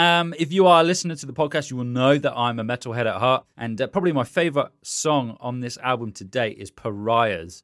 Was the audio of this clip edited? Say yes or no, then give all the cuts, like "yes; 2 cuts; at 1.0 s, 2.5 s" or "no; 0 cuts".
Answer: yes; 1 cut; at 3.5 s